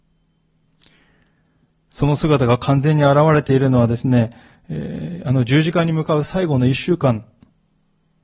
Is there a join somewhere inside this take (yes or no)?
no